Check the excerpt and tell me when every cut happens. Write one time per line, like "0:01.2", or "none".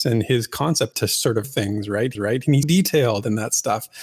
0:00.9
0:01.4
0:02.1
0:02.6